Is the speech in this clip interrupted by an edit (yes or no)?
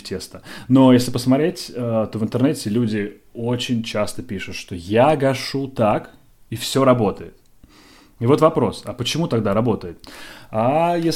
no